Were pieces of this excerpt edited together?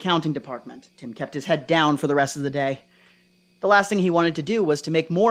yes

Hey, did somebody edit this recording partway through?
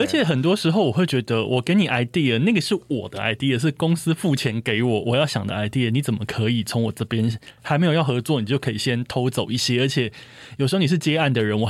no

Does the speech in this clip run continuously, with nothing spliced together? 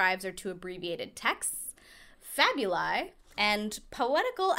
yes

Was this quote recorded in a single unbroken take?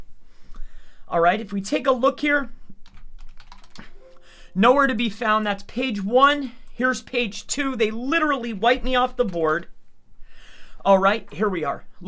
yes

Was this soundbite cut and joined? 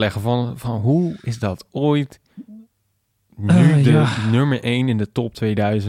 no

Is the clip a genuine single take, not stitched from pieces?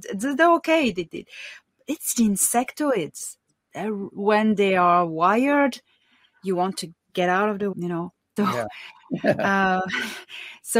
no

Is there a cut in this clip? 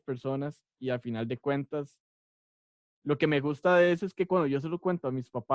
no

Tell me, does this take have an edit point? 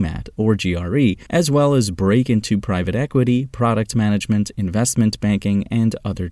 yes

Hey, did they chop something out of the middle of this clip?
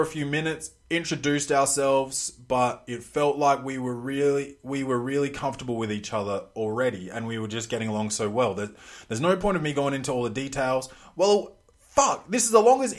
no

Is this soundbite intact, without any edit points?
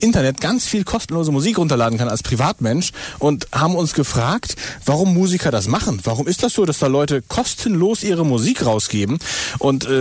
yes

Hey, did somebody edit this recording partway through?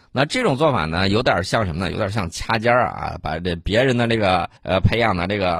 yes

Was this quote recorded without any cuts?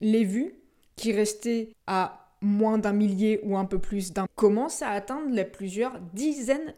no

